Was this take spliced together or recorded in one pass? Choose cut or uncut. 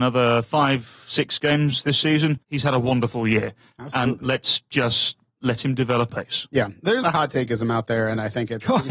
cut